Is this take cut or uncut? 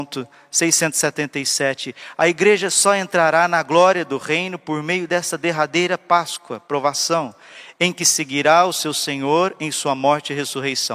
uncut